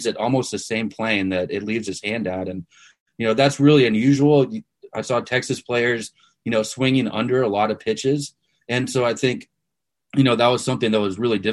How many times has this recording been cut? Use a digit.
0